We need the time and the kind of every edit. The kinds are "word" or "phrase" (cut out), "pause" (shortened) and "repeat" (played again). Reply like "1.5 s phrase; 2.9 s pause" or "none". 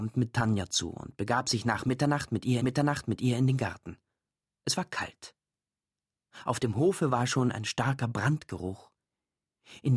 2.6 s repeat